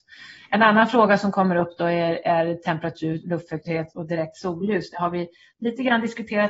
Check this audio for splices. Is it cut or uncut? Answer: uncut